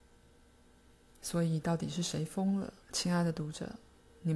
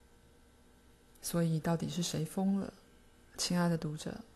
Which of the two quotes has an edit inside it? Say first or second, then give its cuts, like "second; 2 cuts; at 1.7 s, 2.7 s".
first; 1 cut; at 2.8 s